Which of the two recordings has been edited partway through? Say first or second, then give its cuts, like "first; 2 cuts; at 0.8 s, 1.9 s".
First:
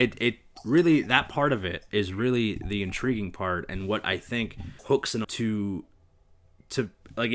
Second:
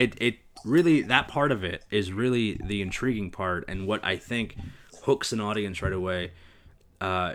first; 2 cuts; at 4.8 s, 5.2 s